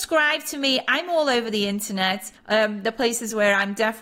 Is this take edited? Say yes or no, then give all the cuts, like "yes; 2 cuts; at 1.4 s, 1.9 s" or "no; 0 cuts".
yes; 1 cut; at 2.4 s